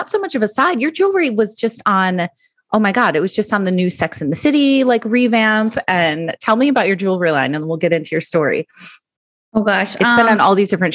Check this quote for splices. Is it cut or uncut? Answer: uncut